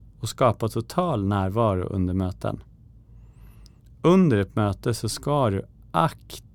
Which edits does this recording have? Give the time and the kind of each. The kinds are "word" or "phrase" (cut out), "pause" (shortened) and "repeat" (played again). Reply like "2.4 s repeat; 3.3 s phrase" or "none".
none